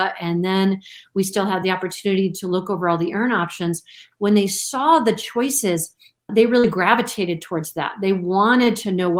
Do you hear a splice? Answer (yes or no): no